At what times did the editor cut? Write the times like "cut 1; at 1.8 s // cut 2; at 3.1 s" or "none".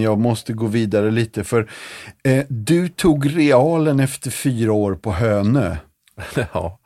none